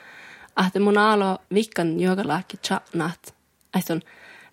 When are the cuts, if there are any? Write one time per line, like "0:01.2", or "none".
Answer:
0:01.4